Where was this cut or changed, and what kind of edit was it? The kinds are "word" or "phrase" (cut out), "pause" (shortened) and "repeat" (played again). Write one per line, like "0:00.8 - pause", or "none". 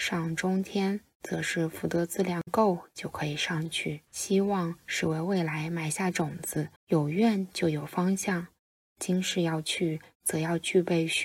0:04.1 - pause
0:06.8 - pause